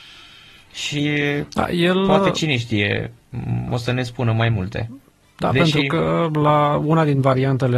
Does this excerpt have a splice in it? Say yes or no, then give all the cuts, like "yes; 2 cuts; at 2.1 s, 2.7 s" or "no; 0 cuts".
no; 0 cuts